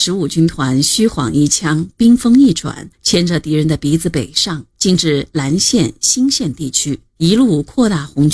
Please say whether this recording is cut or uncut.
cut